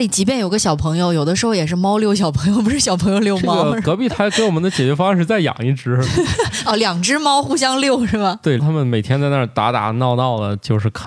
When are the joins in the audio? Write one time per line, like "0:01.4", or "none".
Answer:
0:08.6